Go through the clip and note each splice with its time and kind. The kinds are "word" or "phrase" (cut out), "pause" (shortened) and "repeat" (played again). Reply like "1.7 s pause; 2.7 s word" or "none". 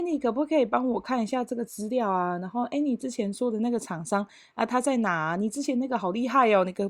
none